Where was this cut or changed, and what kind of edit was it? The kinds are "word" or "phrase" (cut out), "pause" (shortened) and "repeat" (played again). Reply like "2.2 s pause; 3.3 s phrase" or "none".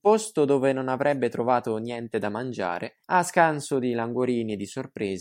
3.0 s pause